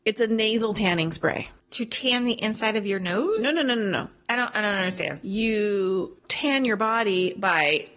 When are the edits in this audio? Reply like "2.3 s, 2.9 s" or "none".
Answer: none